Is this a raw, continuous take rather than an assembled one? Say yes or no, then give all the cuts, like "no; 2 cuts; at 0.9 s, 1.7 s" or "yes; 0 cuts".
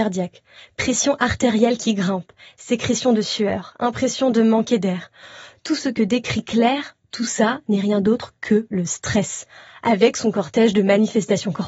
yes; 0 cuts